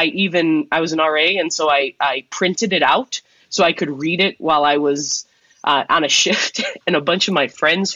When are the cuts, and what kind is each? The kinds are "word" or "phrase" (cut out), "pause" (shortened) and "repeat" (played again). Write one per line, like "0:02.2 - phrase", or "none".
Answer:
none